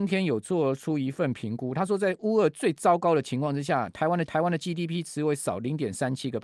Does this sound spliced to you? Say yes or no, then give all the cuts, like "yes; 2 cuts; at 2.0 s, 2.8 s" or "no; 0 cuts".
yes; 1 cut; at 4.3 s